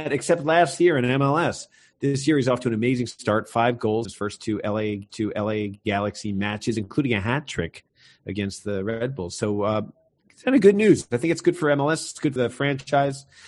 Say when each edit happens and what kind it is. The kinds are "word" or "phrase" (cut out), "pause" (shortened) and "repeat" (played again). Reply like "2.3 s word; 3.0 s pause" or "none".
4.0 s word; 5.1 s repeat; 12.4 s word